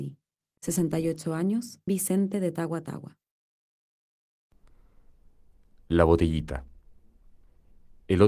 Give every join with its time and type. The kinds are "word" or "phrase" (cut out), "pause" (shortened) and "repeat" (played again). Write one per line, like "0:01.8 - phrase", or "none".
0:01.9 - word